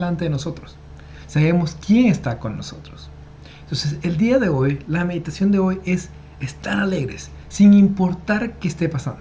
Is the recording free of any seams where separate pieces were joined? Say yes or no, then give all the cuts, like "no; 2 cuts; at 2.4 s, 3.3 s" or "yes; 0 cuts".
yes; 0 cuts